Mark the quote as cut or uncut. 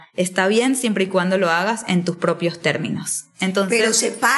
uncut